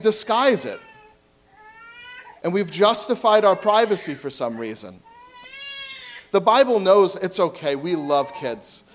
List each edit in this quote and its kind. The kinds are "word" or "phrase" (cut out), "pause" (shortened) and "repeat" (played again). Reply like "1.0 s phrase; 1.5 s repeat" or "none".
2.4 s pause